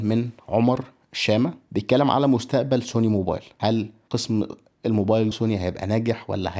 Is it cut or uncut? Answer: cut